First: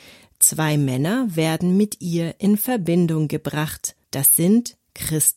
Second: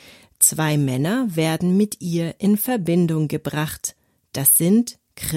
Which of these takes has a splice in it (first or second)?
first